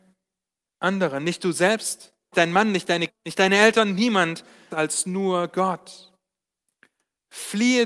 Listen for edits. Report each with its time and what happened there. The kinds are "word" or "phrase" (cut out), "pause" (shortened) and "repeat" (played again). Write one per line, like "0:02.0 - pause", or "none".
0:02.3 - phrase
0:03.1 - word
0:04.7 - phrase